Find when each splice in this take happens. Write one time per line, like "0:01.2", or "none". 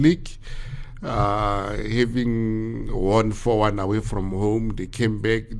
none